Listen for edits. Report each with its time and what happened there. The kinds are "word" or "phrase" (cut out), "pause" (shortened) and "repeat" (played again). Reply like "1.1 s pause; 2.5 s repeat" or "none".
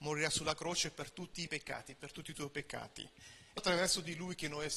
1.5 s word; 3.6 s word